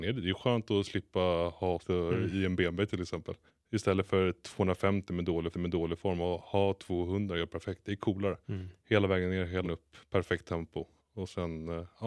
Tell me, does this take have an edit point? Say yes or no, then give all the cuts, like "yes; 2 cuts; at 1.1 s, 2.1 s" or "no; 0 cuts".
yes; 6 cuts; at 1.8 s, 3.5 s, 5.5 s, 8.4 s, 9.6 s, 11.0 s